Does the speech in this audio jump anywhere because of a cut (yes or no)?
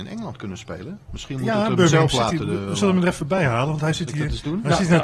no